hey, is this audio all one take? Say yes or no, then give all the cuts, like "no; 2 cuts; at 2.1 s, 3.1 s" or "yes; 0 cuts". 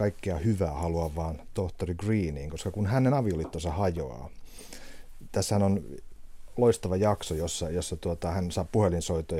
yes; 0 cuts